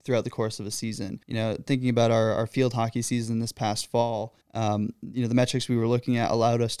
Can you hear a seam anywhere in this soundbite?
yes; 2 cuts; at 1.2 s, 4.4 s

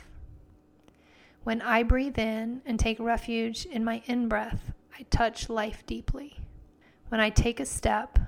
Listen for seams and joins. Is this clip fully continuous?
no; 1 cut; at 6.8 s

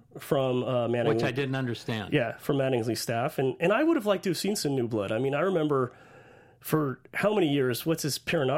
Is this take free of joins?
yes; 0 cuts

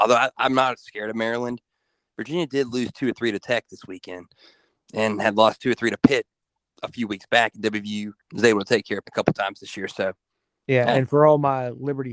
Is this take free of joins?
no; 2 cuts; at 8.2 s, 9.0 s

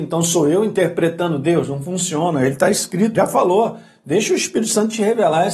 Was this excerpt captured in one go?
no; 1 cut; at 3.1 s

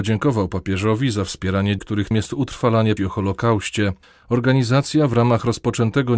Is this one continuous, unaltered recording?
no; 4 cuts; at 1.8 s, 2.1 s, 3.0 s, 4.0 s

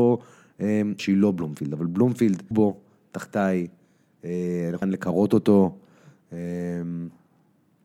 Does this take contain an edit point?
yes; 3 cuts; at 1.0 s, 2.5 s, 4.8 s

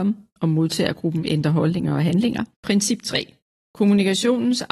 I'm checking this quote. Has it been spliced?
yes; 1 cut; at 2.5 s

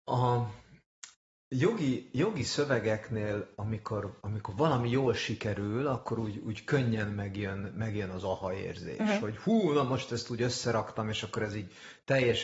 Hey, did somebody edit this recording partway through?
no; 0 cuts

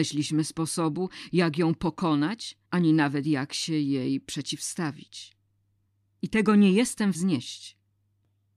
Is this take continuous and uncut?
no; 3 cuts; at 2.6 s, 5.9 s, 7.1 s

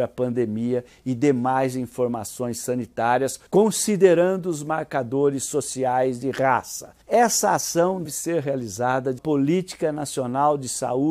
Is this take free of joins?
no; 4 cuts; at 3.5 s, 7.0 s, 8.0 s, 9.2 s

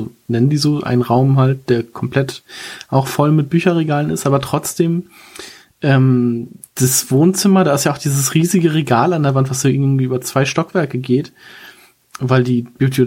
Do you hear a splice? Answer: no; 0 cuts

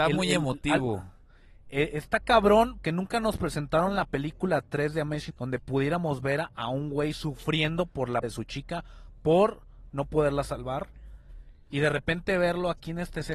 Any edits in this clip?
yes; 3 cuts; at 2.8 s, 5.3 s, 8.2 s

